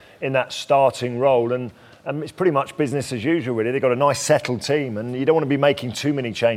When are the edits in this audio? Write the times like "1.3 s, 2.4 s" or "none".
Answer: none